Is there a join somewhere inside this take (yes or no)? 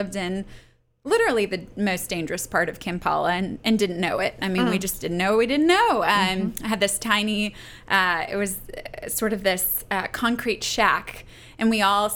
no